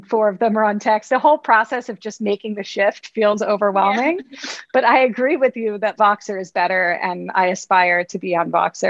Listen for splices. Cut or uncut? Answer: cut